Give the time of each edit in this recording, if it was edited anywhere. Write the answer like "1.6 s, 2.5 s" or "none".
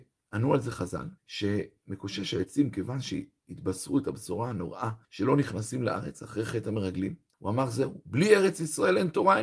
1.2 s, 5.0 s, 7.3 s